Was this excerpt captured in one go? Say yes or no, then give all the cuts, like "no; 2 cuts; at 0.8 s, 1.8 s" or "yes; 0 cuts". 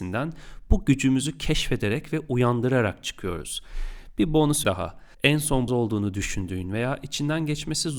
no; 3 cuts; at 4.6 s, 5.1 s, 5.7 s